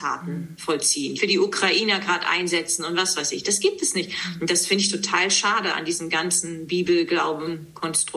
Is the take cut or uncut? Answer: cut